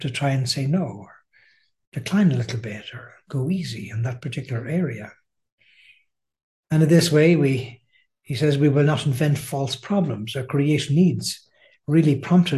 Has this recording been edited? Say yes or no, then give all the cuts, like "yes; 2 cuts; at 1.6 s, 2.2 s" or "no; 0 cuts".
no; 0 cuts